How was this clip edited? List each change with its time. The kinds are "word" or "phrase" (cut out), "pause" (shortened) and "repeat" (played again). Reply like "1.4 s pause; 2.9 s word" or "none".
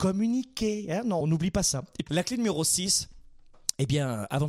1.2 s word; 2.1 s word